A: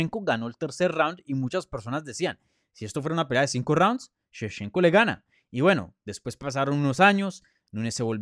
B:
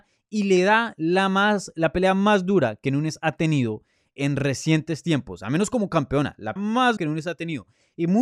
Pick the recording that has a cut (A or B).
B